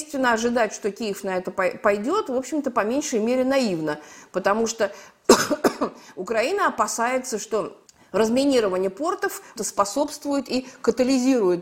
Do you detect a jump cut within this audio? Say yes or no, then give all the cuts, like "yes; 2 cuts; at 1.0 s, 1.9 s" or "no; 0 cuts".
yes; 2 cuts; at 7.9 s, 9.6 s